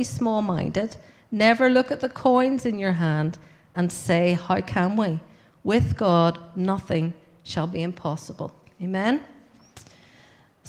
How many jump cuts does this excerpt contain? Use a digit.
0